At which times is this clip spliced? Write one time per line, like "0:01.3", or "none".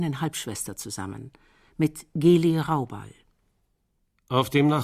none